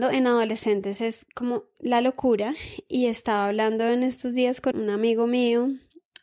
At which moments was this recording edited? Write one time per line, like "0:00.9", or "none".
0:01.7
0:04.7